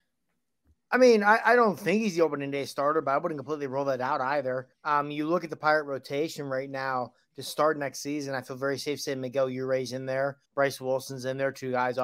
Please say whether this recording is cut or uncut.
cut